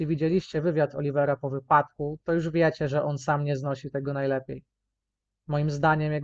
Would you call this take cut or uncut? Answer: uncut